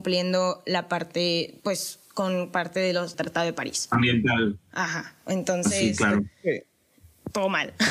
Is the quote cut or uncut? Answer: cut